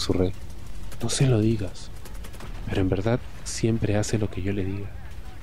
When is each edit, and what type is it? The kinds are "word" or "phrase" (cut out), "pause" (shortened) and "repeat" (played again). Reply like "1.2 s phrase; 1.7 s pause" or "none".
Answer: none